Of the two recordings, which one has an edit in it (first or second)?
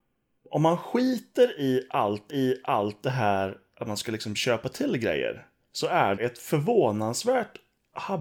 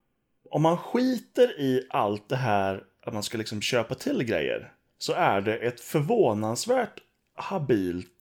first